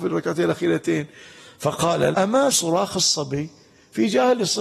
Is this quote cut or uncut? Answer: cut